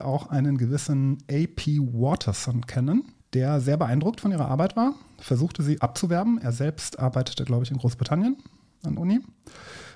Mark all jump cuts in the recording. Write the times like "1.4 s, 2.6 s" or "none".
3.2 s, 5.8 s, 9.0 s